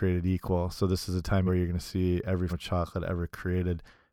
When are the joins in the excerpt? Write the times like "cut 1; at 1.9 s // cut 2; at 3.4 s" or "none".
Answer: cut 1; at 1.5 s // cut 2; at 2.5 s